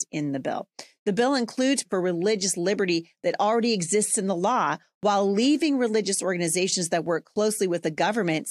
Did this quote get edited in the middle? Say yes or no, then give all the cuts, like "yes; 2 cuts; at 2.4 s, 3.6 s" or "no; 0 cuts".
yes; 1 cut; at 1.8 s